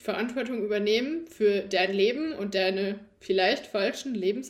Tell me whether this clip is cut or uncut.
uncut